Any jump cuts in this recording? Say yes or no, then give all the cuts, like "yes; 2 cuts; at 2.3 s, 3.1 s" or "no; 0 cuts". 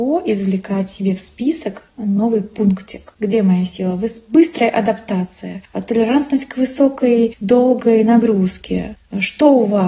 no; 0 cuts